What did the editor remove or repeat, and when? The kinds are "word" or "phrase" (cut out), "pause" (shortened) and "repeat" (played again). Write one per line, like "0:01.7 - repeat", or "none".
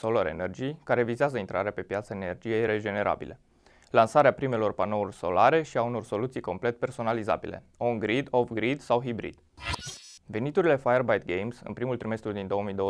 none